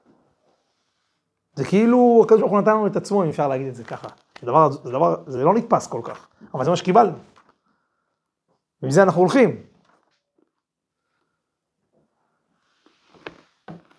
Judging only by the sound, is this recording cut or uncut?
uncut